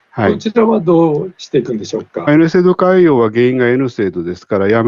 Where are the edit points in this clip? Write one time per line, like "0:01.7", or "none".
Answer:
0:02.3